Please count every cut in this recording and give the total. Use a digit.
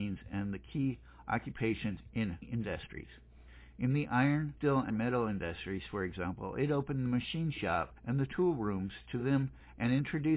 2